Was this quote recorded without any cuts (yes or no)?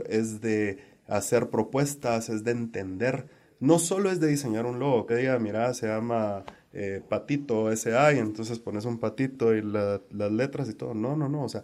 no